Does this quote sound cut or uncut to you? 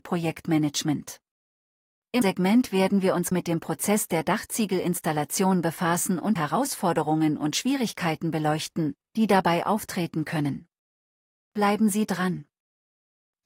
cut